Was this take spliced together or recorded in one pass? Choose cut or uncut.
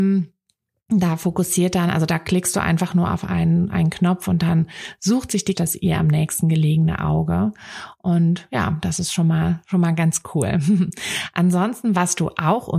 cut